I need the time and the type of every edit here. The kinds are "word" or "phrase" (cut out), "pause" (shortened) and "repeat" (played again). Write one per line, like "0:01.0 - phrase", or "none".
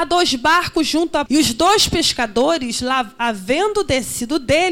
0:01.3 - phrase